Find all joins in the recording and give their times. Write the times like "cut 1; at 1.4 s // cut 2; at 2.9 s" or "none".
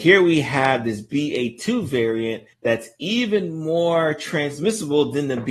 cut 1; at 2.5 s